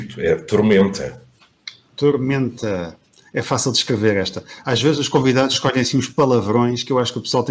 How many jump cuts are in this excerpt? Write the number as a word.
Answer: zero